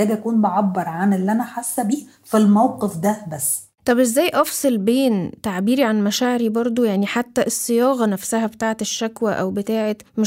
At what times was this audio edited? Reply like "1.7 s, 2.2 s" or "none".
none